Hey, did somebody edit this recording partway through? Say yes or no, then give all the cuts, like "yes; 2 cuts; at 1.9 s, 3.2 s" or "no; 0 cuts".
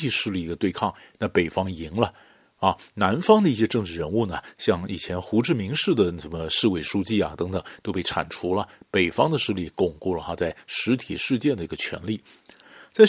no; 0 cuts